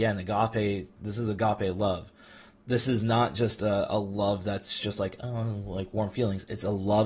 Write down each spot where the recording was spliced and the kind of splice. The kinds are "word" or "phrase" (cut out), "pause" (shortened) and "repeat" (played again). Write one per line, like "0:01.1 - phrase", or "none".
none